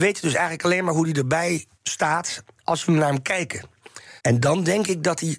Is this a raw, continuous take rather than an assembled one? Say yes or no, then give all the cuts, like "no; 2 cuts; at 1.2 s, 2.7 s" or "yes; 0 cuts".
no; 2 cuts; at 1.7 s, 4.2 s